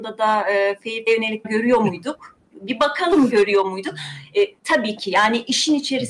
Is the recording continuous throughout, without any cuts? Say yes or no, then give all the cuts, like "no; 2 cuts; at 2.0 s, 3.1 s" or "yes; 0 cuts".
no; 3 cuts; at 1.1 s, 1.4 s, 4.6 s